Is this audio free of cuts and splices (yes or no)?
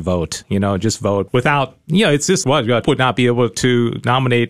no